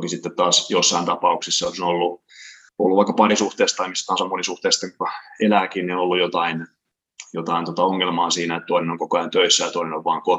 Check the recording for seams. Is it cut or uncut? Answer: cut